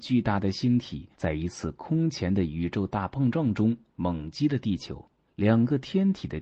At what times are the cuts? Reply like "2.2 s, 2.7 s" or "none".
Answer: 1.1 s, 5.2 s